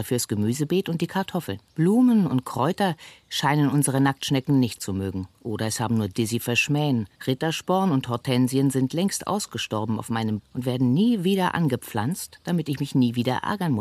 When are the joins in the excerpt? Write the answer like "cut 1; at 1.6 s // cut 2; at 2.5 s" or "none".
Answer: cut 1; at 1.7 s // cut 2; at 4.8 s // cut 3; at 5.3 s // cut 4; at 6.1 s // cut 5; at 7.1 s // cut 6; at 10.4 s

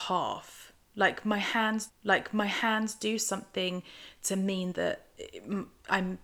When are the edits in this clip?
cut 1; at 1.9 s

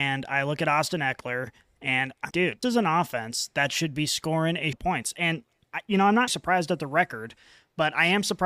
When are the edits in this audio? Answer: cut 1; at 2.3 s // cut 2; at 2.6 s // cut 3; at 4.7 s // cut 4; at 6.3 s

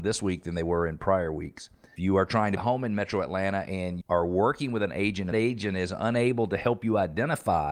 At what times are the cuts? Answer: cut 1; at 2.0 s // cut 2; at 2.6 s // cut 3; at 4.0 s // cut 4; at 5.3 s

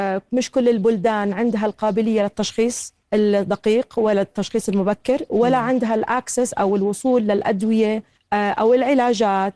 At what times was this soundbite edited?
cut 1; at 3.0 s // cut 2; at 8.2 s

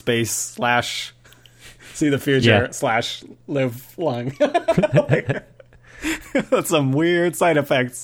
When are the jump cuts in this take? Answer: none

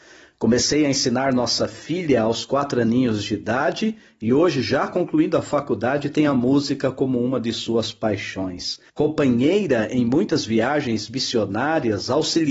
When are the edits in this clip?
cut 1; at 8.9 s

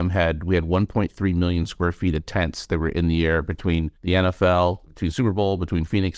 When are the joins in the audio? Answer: cut 1; at 4.0 s // cut 2; at 4.9 s

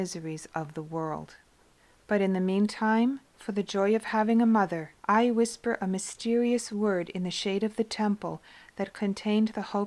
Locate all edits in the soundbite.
cut 1; at 1.8 s // cut 2; at 5.0 s

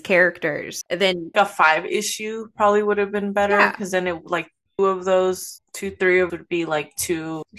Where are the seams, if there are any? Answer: cut 1; at 1.3 s // cut 2; at 4.8 s // cut 3; at 6.3 s

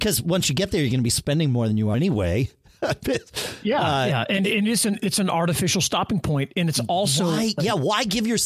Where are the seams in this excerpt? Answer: cut 1; at 1.9 s

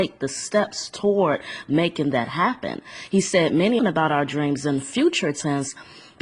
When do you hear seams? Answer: cut 1; at 3.8 s

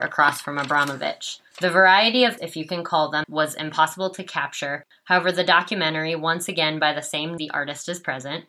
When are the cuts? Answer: cut 1; at 1.5 s // cut 2; at 2.4 s // cut 3; at 3.2 s // cut 4; at 7.4 s

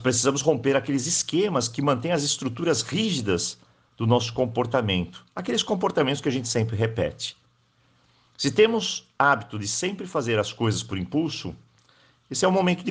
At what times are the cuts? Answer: none

